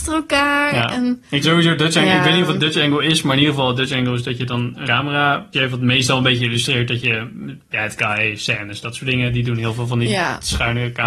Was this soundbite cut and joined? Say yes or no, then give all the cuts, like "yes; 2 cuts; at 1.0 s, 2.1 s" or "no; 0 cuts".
yes; 3 cuts; at 1.4 s, 4.8 s, 5.5 s